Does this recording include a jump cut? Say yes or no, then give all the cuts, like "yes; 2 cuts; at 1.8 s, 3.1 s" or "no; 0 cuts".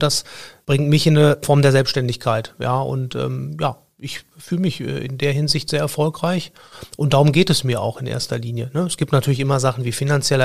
no; 0 cuts